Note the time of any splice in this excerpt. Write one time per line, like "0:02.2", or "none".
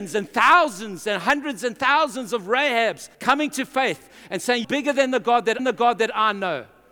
0:03.1
0:04.6
0:05.6